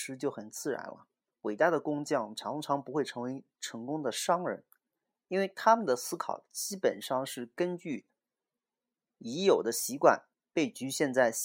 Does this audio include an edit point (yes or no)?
yes